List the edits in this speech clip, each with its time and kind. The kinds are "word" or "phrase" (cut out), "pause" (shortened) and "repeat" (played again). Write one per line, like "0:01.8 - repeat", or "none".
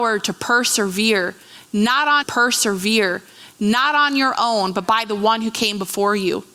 0:02.2 - repeat